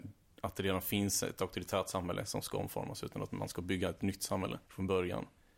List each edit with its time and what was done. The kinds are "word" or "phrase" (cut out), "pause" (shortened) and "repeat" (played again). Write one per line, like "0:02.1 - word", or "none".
0:04.7 - pause